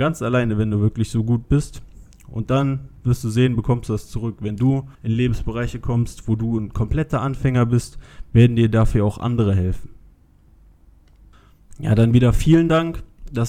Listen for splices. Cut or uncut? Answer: cut